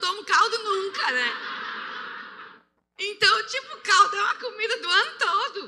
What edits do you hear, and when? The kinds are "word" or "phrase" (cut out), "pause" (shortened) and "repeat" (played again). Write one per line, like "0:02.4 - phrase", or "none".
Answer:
0:02.8 - pause